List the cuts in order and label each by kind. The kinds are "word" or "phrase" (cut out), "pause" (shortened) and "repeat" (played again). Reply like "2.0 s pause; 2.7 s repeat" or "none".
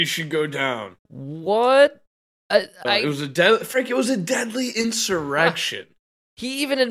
1.0 s pause